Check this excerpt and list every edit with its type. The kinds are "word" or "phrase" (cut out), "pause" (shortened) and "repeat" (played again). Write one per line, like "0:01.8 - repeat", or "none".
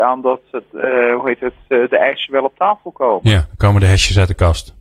none